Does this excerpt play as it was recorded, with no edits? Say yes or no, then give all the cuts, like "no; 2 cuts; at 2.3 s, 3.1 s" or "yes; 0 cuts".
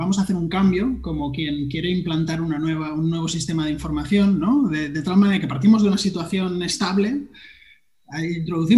yes; 0 cuts